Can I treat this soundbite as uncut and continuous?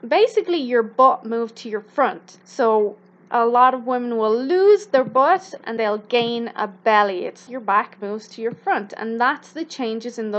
no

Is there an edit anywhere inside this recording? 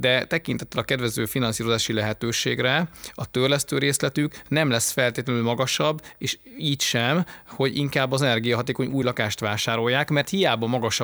no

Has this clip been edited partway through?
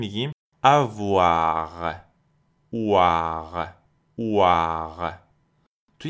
yes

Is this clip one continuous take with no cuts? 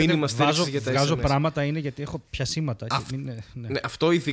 no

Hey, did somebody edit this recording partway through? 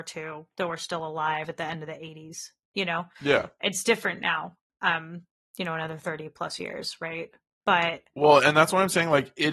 no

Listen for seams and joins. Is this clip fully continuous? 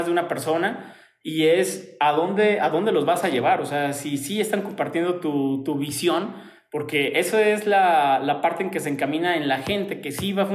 yes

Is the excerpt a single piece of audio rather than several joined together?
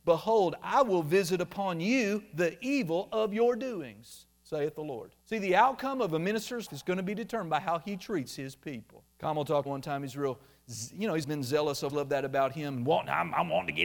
no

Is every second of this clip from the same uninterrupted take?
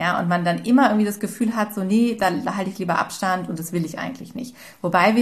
yes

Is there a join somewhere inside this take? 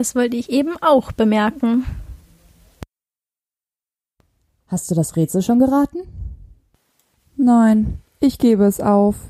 no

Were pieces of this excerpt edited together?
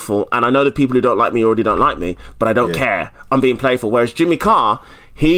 no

